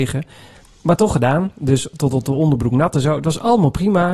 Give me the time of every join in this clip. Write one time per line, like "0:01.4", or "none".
none